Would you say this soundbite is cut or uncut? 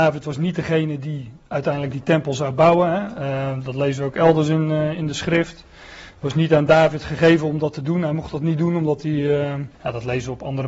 cut